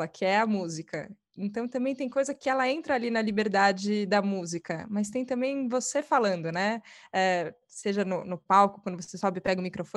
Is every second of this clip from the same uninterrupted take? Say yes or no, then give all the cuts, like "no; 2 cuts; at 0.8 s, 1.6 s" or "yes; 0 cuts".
yes; 0 cuts